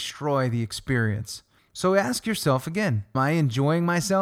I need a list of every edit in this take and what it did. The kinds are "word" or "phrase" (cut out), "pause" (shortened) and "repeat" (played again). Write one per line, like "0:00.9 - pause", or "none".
0:01.6 - pause
0:03.1 - word

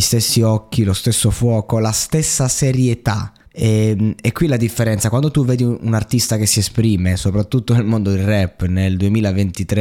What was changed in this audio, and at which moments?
0:03.4 - pause

